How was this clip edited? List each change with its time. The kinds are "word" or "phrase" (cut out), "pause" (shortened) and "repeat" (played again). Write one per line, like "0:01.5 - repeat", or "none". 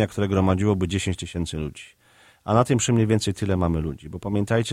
none